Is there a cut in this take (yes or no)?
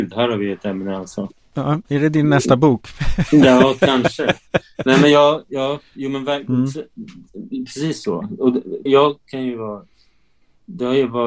yes